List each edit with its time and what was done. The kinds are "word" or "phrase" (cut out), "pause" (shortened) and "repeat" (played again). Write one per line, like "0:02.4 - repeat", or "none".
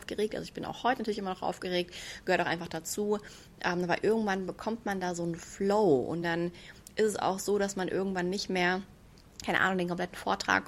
none